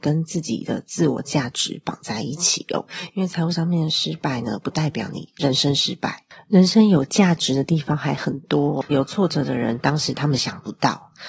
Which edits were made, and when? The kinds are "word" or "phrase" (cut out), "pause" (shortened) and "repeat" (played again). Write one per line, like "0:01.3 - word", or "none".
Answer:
0:08.9 - phrase